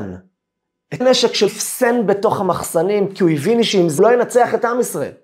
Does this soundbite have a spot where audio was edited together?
yes; 3 cuts; at 1.0 s, 1.5 s, 4.0 s

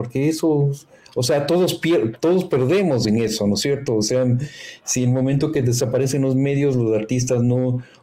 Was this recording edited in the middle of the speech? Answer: no; 0 cuts

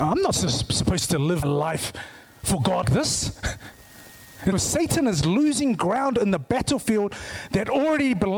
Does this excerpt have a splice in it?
yes; 3 cuts; at 1.4 s, 2.8 s, 4.5 s

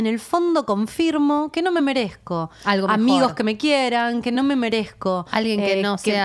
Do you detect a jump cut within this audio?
no; 0 cuts

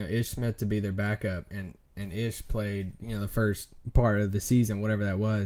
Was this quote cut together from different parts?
no; 0 cuts

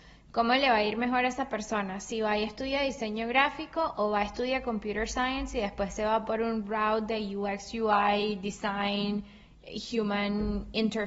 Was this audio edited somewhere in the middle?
no; 0 cuts

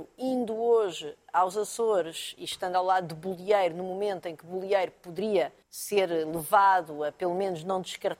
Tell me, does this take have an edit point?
yes; 1 cut; at 5.6 s

